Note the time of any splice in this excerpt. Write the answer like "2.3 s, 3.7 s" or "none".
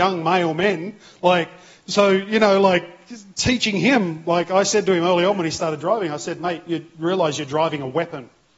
none